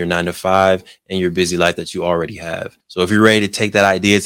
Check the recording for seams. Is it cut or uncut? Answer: cut